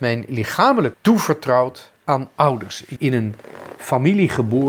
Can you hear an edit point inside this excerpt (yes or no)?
yes